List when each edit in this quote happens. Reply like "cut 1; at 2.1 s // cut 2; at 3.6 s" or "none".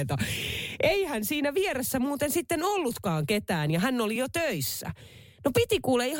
none